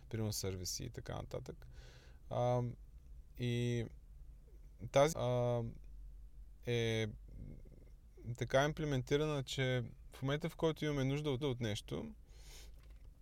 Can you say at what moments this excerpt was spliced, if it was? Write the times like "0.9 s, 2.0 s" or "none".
5.1 s, 11.4 s